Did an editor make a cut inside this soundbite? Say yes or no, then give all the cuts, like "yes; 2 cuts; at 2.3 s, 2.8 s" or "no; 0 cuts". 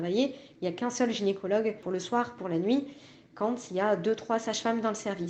no; 0 cuts